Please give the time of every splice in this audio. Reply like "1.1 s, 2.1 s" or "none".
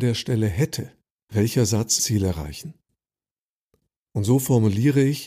1.2 s, 2.0 s